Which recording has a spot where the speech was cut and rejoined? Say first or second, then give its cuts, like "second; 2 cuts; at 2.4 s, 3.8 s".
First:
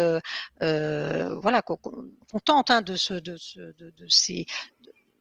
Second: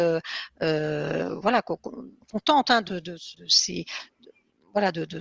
second; 2 cuts; at 2.9 s, 3.3 s